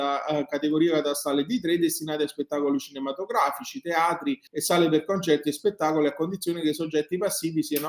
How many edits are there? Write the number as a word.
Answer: one